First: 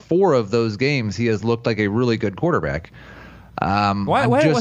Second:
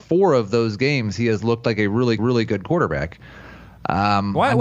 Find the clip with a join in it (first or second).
second